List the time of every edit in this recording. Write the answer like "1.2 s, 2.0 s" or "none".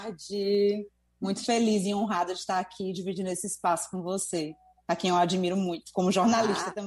none